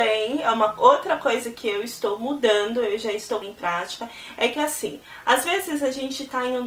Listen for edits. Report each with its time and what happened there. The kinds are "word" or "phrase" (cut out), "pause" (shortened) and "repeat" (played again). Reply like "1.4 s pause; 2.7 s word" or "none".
3.4 s word